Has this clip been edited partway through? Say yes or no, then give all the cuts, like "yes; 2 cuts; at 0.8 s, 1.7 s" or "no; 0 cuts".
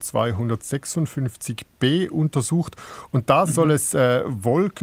no; 0 cuts